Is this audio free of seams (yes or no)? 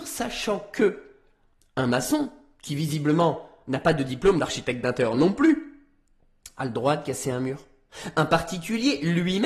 yes